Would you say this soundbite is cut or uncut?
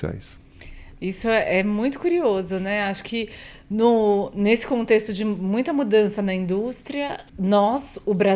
cut